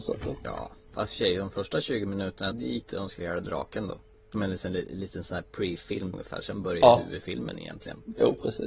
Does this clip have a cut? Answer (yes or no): yes